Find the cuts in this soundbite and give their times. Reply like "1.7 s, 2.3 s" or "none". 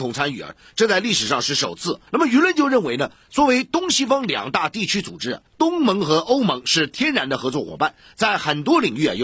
2.1 s, 5.5 s